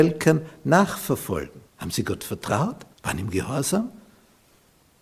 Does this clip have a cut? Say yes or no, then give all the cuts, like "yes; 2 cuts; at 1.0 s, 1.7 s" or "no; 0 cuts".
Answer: yes; 2 cuts; at 1.7 s, 2.9 s